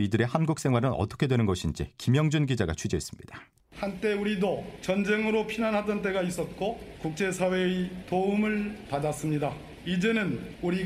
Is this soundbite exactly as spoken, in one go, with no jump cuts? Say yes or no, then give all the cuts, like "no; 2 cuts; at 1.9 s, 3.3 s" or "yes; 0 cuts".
no; 1 cut; at 3.6 s